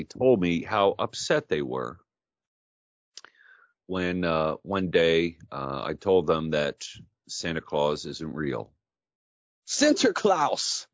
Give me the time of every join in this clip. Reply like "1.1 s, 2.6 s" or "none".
none